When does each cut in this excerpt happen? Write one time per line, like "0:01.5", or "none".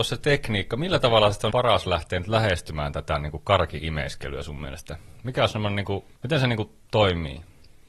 0:01.5
0:06.1

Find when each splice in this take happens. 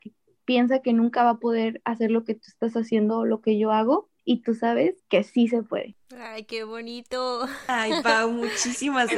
0:04.2
0:05.0
0:06.0

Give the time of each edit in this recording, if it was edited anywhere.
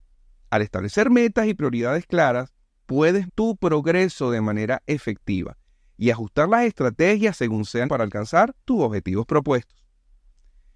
0:03.3
0:07.8
0:08.6

